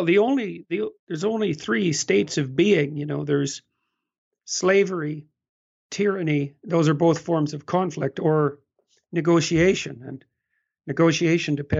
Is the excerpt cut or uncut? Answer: uncut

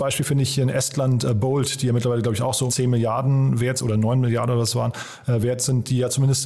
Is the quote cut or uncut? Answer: cut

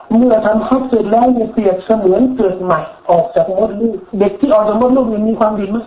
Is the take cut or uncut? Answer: cut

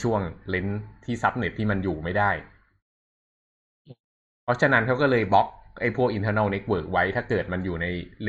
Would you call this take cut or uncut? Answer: uncut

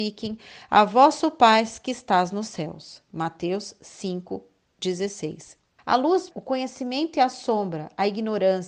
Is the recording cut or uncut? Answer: cut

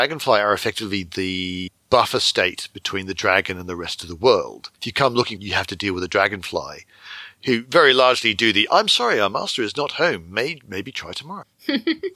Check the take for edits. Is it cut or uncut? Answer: cut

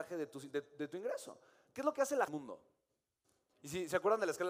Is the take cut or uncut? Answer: cut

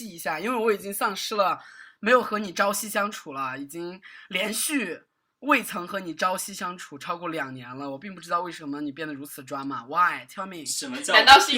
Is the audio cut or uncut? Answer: uncut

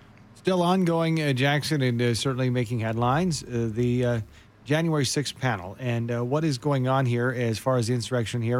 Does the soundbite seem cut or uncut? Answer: uncut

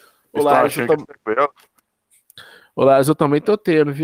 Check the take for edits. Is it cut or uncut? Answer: uncut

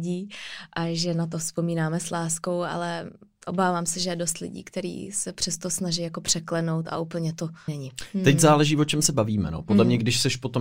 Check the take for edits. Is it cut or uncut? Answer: cut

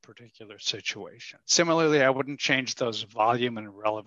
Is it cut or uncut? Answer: cut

